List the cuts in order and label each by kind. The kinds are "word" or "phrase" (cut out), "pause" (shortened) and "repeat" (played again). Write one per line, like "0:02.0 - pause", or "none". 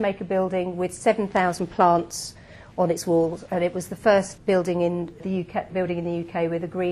0:04.4 - word
0:05.2 - word
0:05.7 - word